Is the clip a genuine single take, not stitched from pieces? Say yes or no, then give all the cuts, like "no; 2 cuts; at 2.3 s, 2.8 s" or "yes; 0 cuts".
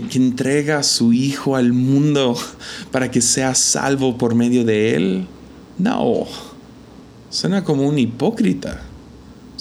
yes; 0 cuts